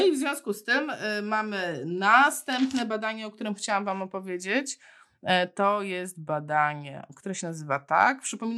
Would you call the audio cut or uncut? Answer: uncut